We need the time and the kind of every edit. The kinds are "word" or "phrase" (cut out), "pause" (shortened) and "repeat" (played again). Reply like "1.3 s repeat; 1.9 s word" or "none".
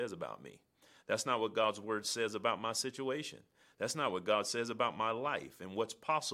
none

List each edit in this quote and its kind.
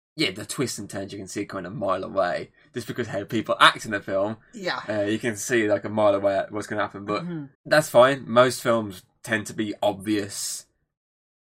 7.5 s pause

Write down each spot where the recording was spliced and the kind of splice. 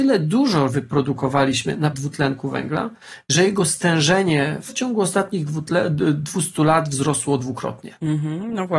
1.9 s word; 4.7 s word

